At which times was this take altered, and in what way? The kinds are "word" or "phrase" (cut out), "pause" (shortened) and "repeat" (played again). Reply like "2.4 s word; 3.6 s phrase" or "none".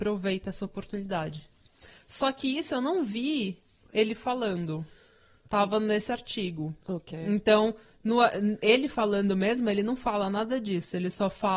none